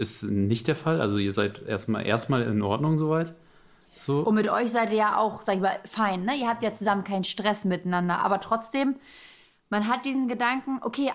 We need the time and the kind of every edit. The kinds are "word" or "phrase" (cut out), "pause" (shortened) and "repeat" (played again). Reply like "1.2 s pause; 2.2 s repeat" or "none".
none